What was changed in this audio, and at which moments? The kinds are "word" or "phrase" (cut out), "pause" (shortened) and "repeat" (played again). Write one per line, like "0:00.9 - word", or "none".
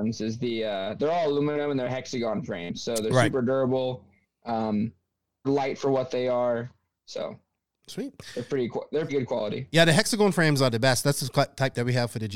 0:05.4 - word
0:09.1 - word

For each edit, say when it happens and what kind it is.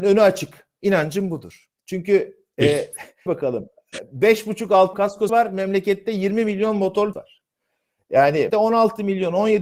0:01.8 - pause
0:03.3 - word
0:04.9 - word
0:05.3 - word
0:07.1 - word
0:08.5 - word

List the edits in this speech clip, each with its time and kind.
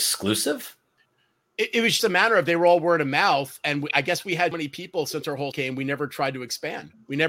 0:02.0 - word
0:04.5 - word
0:05.5 - word

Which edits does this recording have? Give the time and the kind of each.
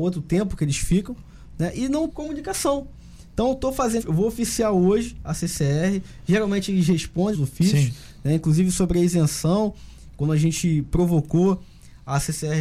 0:02.1 - word
0:04.0 - word
0:07.3 - word

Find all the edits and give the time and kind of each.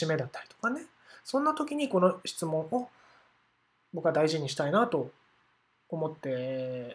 none

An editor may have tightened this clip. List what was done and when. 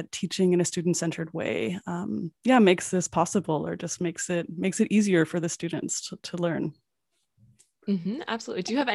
0:02.4 - pause

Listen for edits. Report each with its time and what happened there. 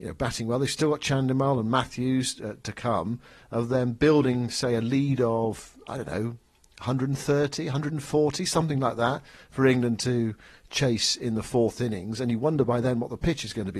none

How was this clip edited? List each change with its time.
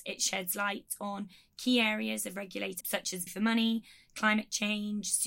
0:02.8 - word
0:03.3 - word

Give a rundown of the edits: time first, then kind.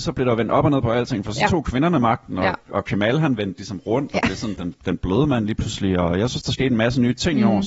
none

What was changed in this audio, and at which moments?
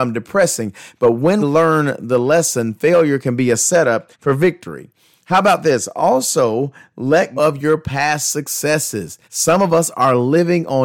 0:01.4 - word
0:04.1 - pause
0:07.4 - word
0:09.2 - pause

